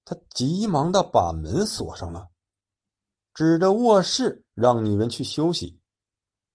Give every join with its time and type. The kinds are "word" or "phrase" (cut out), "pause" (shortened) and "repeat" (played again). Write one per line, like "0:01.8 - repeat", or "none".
none